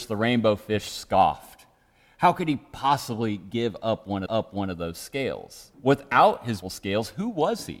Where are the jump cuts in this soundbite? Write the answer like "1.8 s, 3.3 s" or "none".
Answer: 4.3 s, 5.7 s, 6.6 s

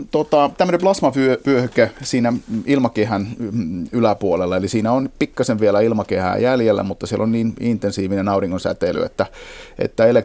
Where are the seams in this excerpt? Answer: none

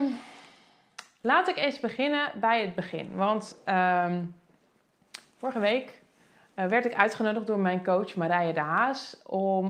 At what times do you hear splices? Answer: none

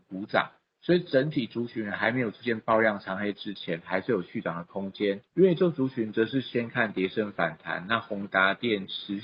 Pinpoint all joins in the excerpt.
5.3 s

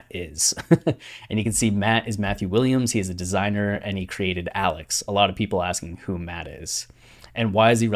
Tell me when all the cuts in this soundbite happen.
none

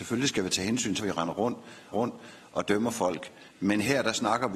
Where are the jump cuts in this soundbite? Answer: 1.0 s, 1.9 s, 3.5 s

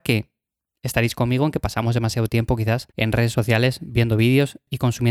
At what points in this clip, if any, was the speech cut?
2.9 s

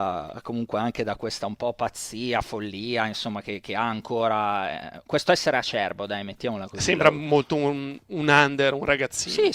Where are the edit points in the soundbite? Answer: none

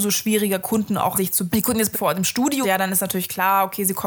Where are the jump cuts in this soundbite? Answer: 1.1 s, 1.5 s, 1.9 s, 2.6 s

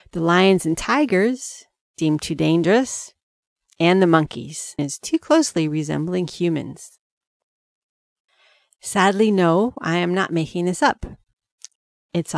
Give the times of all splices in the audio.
4.8 s

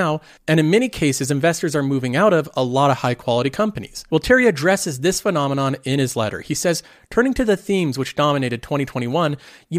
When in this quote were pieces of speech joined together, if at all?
none

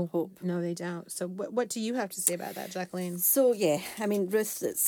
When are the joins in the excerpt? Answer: none

